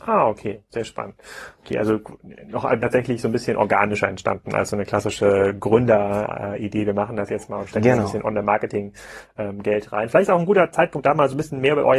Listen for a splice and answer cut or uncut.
cut